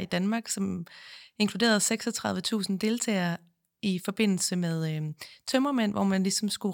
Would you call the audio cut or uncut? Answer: uncut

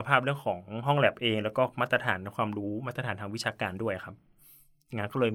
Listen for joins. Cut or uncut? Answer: uncut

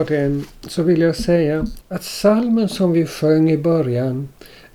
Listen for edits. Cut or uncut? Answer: uncut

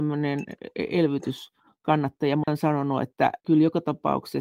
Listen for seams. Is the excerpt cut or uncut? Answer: cut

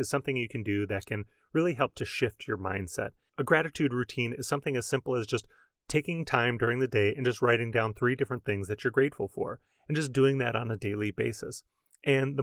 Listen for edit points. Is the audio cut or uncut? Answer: uncut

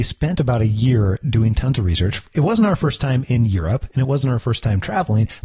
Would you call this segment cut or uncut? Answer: uncut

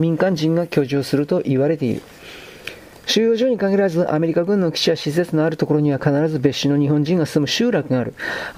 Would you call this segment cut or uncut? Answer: uncut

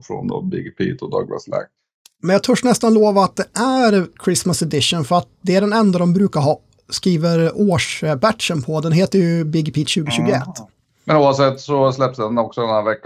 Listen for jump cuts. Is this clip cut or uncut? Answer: uncut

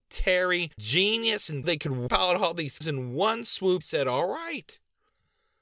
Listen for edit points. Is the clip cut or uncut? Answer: cut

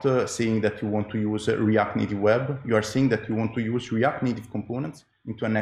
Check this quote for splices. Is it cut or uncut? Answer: uncut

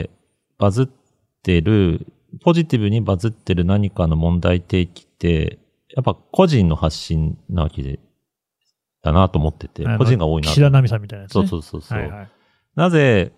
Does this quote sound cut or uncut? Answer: uncut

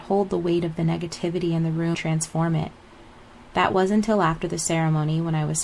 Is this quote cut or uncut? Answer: cut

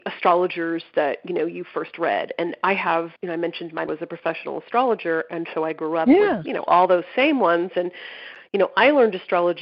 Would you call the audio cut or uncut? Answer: cut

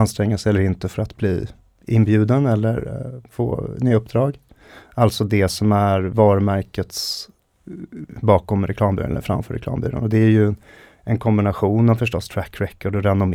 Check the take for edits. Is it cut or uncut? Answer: uncut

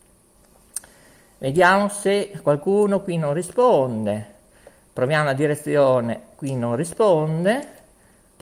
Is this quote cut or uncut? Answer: uncut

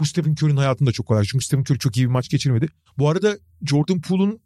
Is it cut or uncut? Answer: uncut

